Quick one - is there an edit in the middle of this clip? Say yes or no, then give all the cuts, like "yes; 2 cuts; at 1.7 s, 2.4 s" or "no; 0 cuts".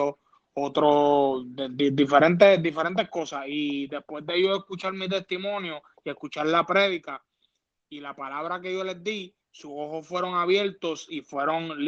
no; 0 cuts